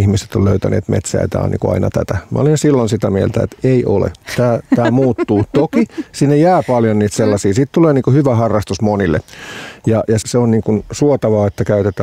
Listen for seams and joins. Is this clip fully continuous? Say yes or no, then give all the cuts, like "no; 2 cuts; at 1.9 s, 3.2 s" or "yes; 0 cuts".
no; 1 cut; at 10.2 s